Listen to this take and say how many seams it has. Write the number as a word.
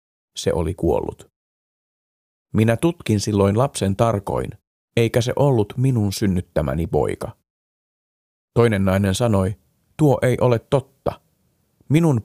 zero